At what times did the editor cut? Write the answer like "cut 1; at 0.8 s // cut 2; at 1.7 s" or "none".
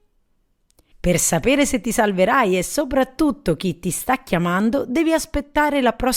none